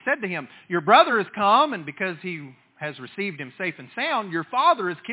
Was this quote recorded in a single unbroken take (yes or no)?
yes